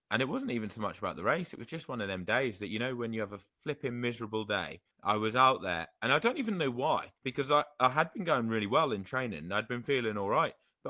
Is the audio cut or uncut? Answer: cut